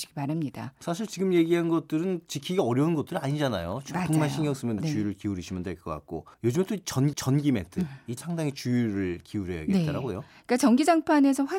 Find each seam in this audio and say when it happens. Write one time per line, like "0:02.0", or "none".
0:04.8
0:06.3
0:07.1
0:08.2